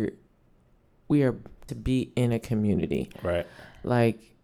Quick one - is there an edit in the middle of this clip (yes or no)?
yes